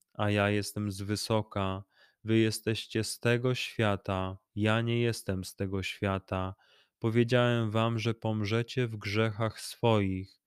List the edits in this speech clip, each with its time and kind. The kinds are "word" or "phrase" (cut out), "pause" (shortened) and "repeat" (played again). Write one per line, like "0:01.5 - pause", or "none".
none

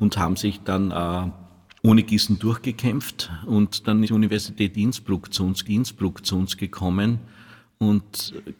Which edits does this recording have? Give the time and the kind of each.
0:01.8 - word
0:04.0 - word
0:05.6 - repeat

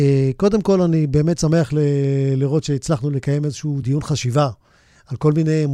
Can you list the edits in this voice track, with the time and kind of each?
none

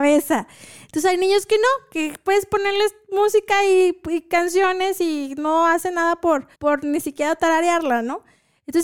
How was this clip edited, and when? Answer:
0:06.5 - pause

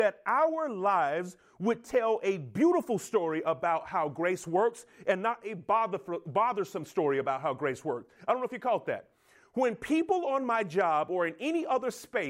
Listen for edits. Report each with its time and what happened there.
none

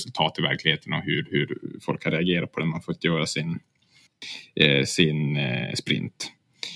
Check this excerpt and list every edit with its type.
none

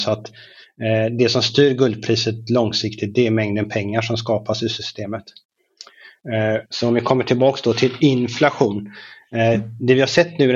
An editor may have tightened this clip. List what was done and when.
0:06.7 - pause

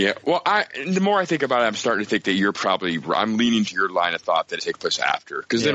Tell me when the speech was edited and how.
0:03.7 - word
0:04.6 - phrase

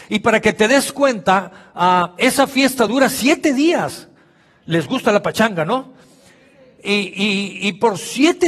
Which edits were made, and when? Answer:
none

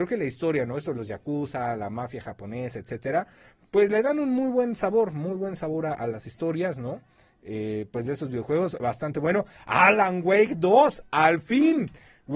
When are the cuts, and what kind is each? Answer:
none

